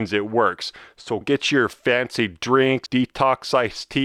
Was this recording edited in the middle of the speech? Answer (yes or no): yes